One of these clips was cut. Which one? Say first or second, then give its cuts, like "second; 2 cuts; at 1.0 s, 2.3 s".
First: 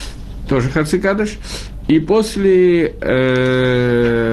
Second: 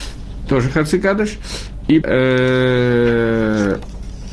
second; 1 cut; at 2.0 s